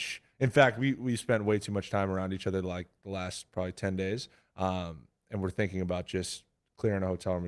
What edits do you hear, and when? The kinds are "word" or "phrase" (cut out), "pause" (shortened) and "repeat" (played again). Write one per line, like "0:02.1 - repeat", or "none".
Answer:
none

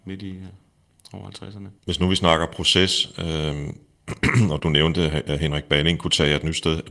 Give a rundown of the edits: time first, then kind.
0:01.8 - pause
0:04.6 - word

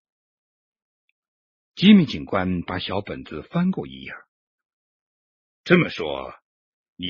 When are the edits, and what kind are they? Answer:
none

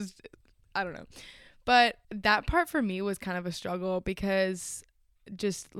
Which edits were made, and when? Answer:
0:02.0 - pause

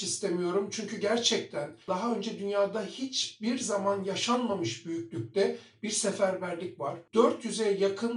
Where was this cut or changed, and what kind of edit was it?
0:01.8 - pause

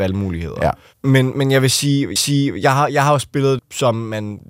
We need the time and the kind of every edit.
0:02.2 - repeat
0:03.6 - word

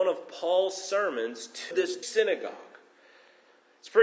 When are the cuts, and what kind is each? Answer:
0:01.7 - word
0:02.0 - word

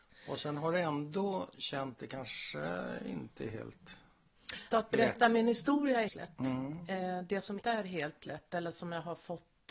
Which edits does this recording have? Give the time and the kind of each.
0:02.0 - word
0:04.7 - word
0:06.1 - word
0:07.6 - word

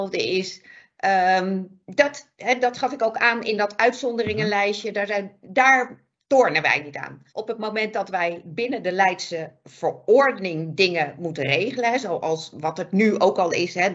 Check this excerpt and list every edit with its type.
0:02.6 - word
0:07.3 - pause

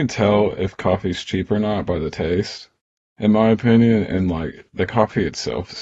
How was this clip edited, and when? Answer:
none

